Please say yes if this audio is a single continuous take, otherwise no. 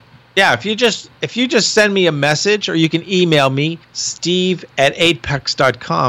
no